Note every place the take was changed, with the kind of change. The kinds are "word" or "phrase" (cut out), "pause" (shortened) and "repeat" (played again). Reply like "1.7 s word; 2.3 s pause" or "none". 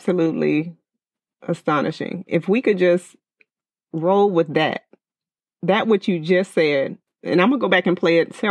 none